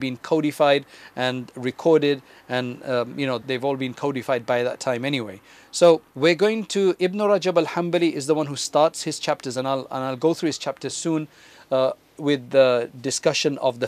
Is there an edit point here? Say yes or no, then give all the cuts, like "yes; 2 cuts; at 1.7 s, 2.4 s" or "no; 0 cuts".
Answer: yes; 3 cuts; at 3.4 s, 6.1 s, 12.2 s